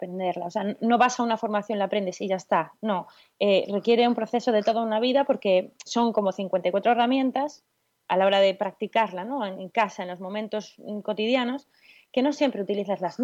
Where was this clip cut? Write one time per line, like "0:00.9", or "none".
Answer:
0:05.9